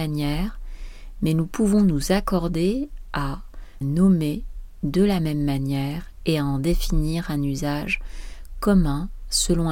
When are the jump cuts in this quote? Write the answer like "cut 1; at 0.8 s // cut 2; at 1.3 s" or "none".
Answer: cut 1; at 3.8 s